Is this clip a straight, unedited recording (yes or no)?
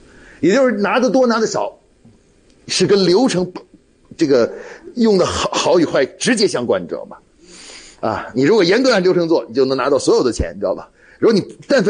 yes